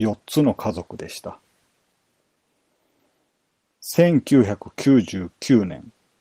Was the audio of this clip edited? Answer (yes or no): no